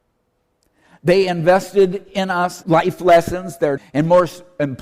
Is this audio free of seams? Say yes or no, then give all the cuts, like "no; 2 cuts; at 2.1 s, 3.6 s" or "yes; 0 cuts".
no; 2 cuts; at 2.6 s, 3.8 s